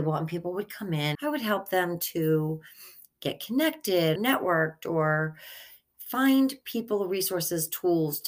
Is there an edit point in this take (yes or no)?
yes